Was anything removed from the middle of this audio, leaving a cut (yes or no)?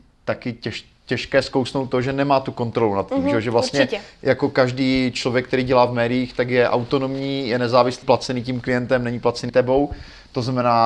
yes